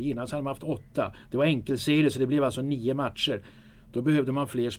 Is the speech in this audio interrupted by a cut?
no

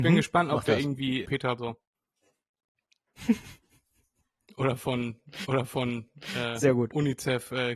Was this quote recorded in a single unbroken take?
no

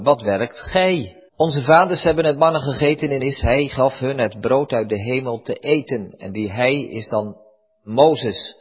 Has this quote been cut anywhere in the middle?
yes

